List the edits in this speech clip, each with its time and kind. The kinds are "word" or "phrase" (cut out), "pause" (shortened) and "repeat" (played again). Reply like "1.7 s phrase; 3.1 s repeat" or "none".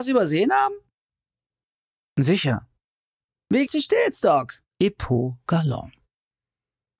3.7 s word; 4.7 s pause

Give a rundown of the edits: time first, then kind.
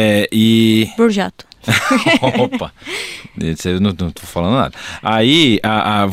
1.6 s pause

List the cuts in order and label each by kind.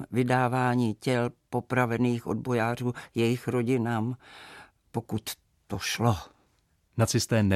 none

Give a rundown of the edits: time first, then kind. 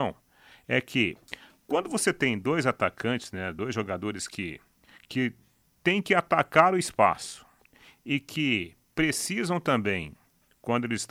none

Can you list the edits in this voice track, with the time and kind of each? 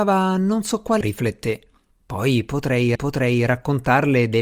1.0 s word; 1.9 s pause; 3.0 s repeat

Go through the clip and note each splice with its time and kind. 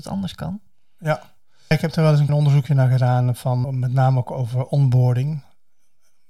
1.7 s word; 2.3 s word; 3.6 s word

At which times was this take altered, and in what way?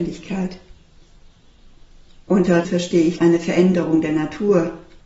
2.6 s word; 3.2 s word

